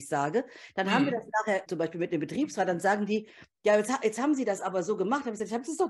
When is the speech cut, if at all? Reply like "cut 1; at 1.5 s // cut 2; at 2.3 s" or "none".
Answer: cut 1; at 1.7 s